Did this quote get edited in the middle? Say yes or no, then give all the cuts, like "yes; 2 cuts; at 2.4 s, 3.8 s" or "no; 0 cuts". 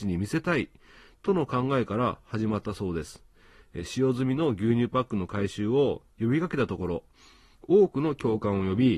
no; 0 cuts